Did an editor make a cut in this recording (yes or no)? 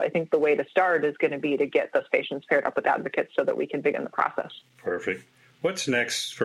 no